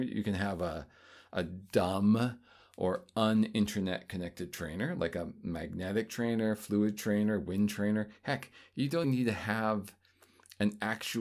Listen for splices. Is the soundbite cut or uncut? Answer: cut